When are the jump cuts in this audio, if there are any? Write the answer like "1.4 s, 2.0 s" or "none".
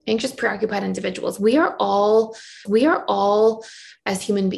2.7 s